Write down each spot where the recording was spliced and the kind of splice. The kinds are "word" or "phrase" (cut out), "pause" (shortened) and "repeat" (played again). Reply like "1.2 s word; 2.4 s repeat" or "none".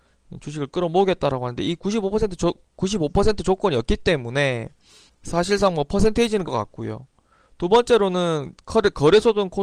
5.1 s pause; 6.5 s phrase